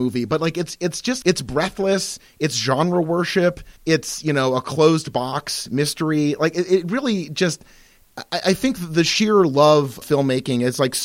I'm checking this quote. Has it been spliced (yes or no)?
yes